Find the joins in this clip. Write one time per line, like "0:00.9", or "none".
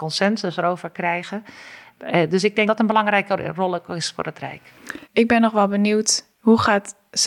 0:02.7
0:05.0